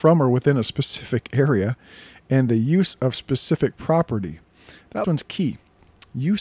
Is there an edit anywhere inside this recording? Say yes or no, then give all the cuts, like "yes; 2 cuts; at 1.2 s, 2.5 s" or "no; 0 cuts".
yes; 1 cut; at 5.0 s